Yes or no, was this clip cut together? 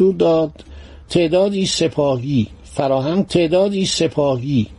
yes